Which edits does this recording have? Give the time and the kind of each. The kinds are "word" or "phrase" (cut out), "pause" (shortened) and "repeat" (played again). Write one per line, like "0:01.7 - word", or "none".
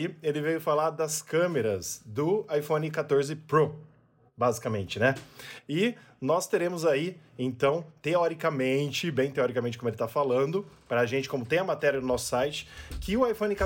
none

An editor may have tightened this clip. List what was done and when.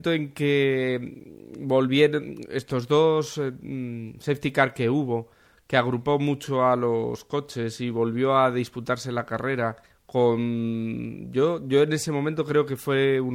0:09.8 - pause

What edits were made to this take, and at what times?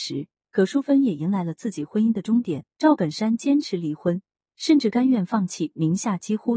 0:02.7 - pause

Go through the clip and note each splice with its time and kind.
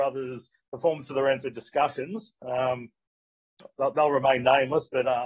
0:01.4 - phrase

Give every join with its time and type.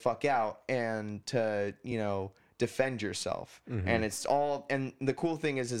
none

